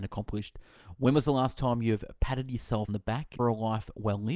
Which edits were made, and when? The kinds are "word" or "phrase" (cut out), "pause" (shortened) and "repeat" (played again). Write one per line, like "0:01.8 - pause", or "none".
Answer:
0:02.9 - word
0:03.4 - word